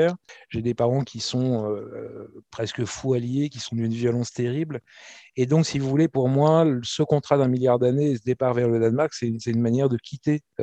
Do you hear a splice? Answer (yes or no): no